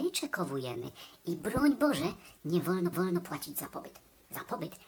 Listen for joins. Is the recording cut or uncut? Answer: cut